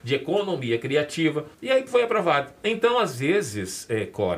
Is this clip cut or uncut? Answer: cut